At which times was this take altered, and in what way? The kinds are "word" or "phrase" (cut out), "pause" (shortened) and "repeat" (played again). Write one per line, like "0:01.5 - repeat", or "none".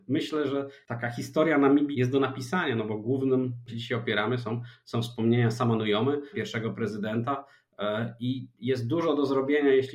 0:01.9 - word
0:03.7 - phrase
0:06.3 - word

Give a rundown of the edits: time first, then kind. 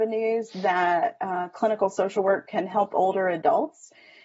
none

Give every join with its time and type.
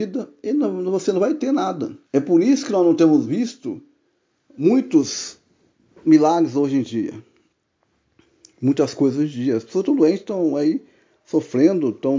0:02.0 - pause

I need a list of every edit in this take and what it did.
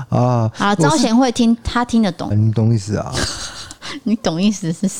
0:02.3 - phrase

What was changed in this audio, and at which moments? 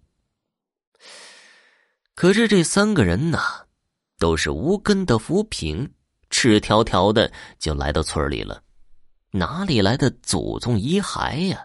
none

